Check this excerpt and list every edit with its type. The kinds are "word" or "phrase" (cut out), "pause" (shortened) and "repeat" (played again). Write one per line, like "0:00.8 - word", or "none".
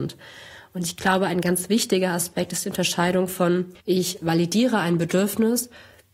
0:03.8 - pause